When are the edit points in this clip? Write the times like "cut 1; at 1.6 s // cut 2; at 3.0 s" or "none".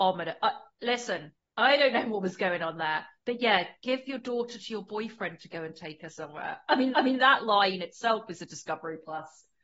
cut 1; at 1.4 s // cut 2; at 6.9 s

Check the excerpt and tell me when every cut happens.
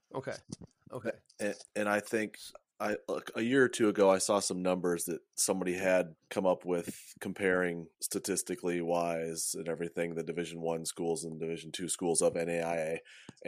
cut 1; at 6.2 s // cut 2; at 7.9 s

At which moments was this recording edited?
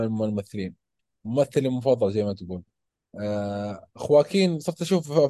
cut 1; at 3.9 s

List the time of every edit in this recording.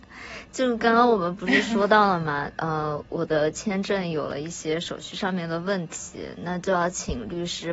cut 1; at 3.1 s

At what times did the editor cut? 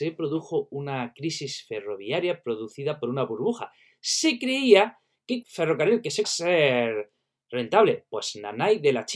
cut 1; at 5.4 s // cut 2; at 6.2 s

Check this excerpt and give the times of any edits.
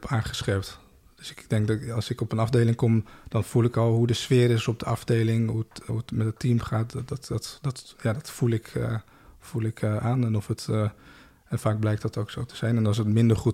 cut 1; at 5.9 s

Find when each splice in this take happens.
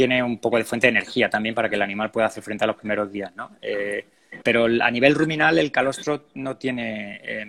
cut 1; at 4.4 s

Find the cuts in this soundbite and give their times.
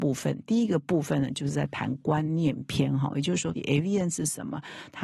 cut 1; at 3.5 s

